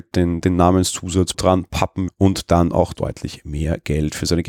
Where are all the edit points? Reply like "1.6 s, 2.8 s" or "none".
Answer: 1.3 s, 2.1 s, 2.9 s